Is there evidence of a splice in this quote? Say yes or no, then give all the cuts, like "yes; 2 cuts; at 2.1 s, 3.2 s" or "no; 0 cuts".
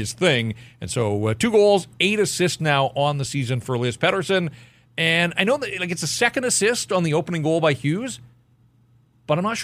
no; 0 cuts